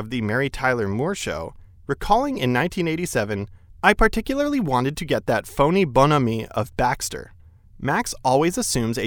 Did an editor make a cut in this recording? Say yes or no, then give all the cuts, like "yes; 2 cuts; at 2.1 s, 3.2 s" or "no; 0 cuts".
no; 0 cuts